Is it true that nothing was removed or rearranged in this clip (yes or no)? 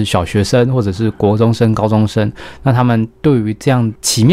yes